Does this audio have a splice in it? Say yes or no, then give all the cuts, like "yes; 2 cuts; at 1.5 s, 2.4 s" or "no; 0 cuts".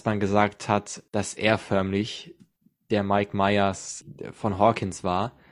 no; 0 cuts